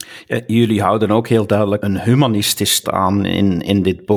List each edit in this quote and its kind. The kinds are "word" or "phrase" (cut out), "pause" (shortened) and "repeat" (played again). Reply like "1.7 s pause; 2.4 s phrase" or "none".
1.8 s word; 2.8 s word